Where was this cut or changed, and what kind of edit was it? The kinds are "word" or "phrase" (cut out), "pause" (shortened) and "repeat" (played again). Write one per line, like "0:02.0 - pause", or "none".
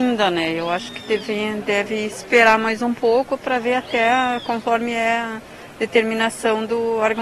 none